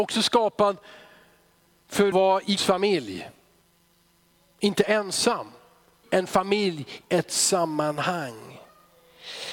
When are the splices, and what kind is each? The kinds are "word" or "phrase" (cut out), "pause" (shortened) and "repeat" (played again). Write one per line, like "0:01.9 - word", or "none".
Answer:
0:02.1 - word
0:02.6 - word
0:06.0 - word
0:07.0 - word